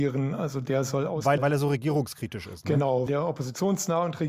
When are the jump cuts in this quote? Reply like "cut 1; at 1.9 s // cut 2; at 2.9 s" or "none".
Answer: cut 1; at 1.4 s // cut 2; at 3.1 s